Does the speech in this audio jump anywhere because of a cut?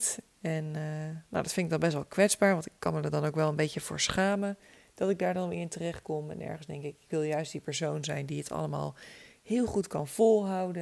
no; 0 cuts

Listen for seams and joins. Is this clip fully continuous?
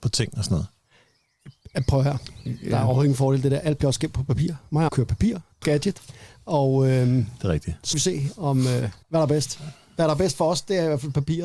no; 4 cuts; at 4.9 s, 5.6 s, 7.9 s, 9.0 s

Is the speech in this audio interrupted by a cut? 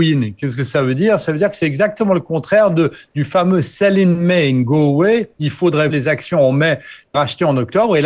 yes; 2 cuts; at 5.9 s, 7.1 s

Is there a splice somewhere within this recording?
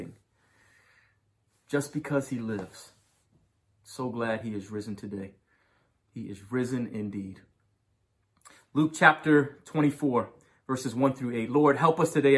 no; 0 cuts

